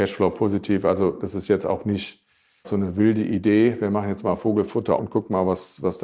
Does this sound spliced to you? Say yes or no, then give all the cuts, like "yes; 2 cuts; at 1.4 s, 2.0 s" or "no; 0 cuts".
yes; 2 cuts; at 2.6 s, 5.0 s